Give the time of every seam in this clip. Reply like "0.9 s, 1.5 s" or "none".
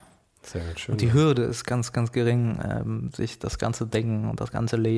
none